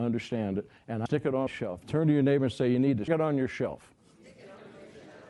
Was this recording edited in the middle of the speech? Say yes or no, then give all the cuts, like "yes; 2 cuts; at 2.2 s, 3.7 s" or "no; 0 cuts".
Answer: yes; 3 cuts; at 1.1 s, 1.5 s, 3.1 s